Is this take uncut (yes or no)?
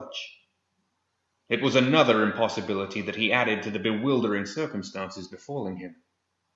yes